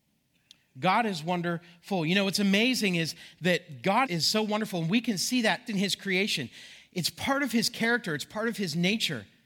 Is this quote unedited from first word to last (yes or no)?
no